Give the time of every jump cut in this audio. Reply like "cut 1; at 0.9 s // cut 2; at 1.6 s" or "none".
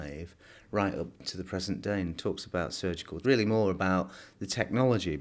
cut 1; at 3.2 s